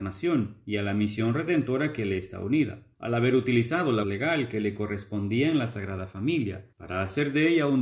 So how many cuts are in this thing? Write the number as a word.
three